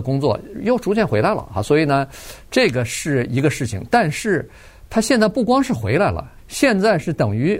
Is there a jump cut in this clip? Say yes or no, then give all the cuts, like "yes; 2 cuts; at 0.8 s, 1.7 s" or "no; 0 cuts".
yes; 1 cut; at 6.4 s